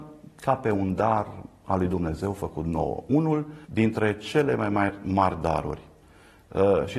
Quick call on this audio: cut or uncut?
cut